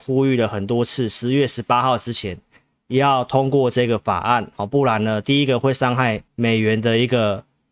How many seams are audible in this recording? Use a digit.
1